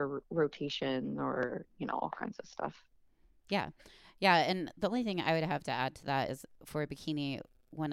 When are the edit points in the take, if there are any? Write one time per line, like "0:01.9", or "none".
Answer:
none